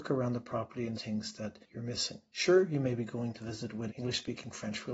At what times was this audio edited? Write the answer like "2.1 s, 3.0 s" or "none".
0.9 s, 1.6 s, 3.9 s